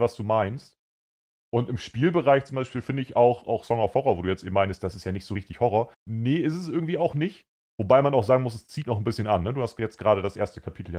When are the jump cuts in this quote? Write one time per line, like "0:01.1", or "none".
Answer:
0:05.9